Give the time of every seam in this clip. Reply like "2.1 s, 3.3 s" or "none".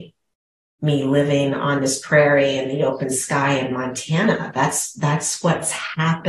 none